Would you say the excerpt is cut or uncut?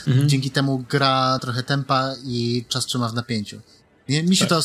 cut